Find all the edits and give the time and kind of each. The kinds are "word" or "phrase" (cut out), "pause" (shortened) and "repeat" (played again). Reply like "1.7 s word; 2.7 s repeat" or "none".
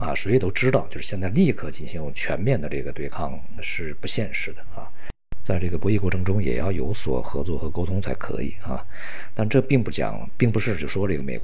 3.6 s word